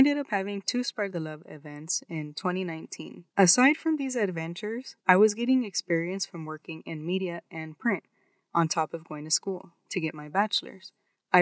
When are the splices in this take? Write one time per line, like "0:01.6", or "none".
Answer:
0:03.3
0:05.0